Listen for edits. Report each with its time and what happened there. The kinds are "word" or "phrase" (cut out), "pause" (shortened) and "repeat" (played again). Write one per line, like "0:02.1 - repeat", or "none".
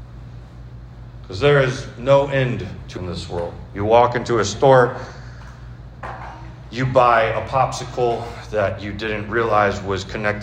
0:03.0 - word